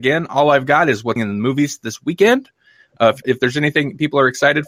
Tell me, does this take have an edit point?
yes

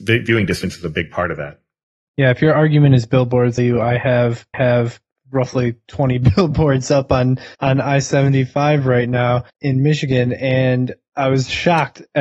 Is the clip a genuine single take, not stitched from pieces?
no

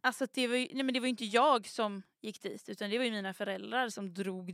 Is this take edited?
no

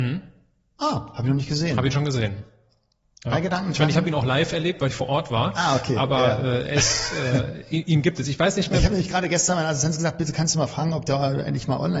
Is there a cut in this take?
no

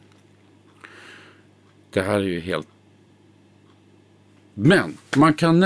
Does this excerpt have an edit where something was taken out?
no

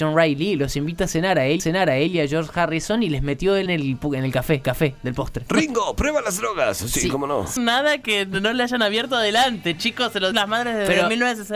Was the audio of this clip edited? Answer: yes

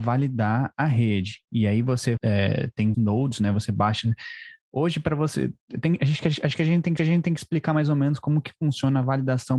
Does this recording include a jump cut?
yes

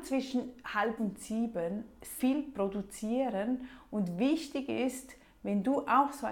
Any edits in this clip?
yes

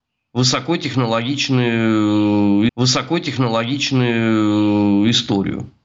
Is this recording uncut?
no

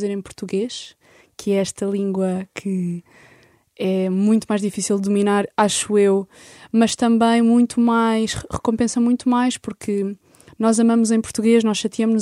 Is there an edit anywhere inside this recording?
no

